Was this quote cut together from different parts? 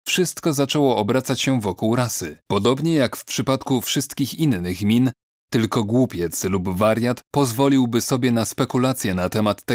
yes; 1 cut; at 2.4 s

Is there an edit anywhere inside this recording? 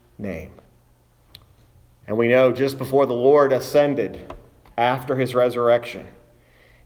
yes; 1 cut; at 1.3 s

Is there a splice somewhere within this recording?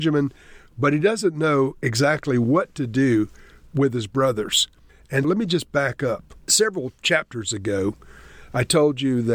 yes; 2 cuts; at 5.2 s, 6.4 s

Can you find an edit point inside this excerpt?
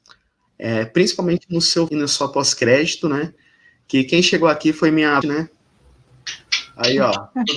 yes; 2 cuts; at 1.9 s, 5.2 s

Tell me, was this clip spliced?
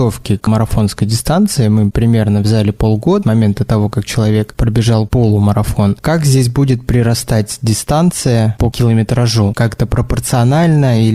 yes; 1 cut; at 3.2 s

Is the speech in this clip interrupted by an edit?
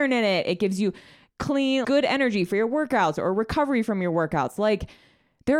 yes; 1 cut; at 1.8 s

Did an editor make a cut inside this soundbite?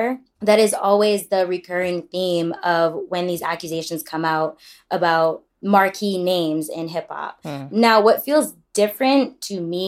no; 0 cuts

